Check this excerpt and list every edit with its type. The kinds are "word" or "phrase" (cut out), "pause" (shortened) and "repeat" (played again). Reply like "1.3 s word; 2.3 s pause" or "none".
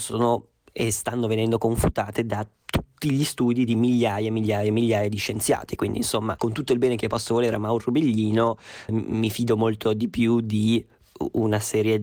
8.9 s word